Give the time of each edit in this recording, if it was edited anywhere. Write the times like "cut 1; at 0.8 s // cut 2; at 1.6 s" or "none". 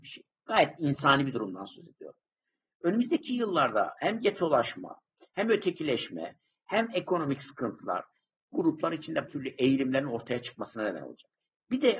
cut 1; at 8.5 s // cut 2; at 9.3 s